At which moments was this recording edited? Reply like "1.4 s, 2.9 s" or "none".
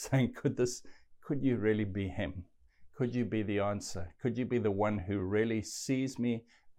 none